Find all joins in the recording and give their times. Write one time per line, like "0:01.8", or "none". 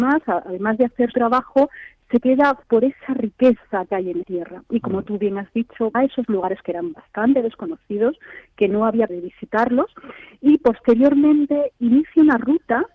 0:01.1
0:02.6
0:04.2
0:05.9
0:06.6
0:09.1